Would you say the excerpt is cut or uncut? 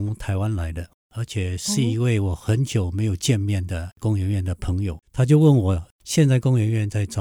cut